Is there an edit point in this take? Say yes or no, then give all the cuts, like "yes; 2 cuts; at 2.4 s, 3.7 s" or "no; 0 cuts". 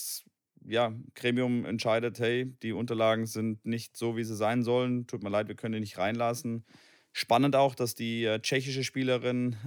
no; 0 cuts